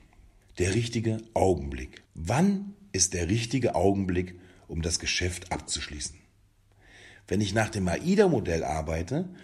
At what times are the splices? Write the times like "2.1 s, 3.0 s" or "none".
2.1 s